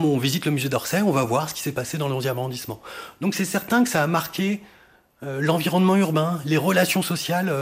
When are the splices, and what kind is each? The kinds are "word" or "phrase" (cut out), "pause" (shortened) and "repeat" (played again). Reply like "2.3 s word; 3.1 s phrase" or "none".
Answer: none